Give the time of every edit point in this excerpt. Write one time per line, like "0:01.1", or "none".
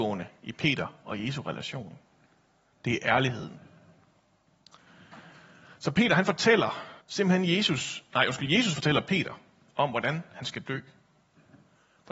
0:07.0